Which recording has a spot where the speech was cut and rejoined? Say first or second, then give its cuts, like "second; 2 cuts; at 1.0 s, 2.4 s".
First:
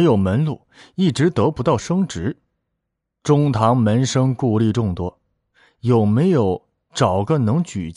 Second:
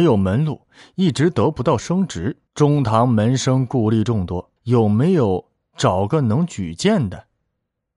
second; 2 cuts; at 2.5 s, 4.6 s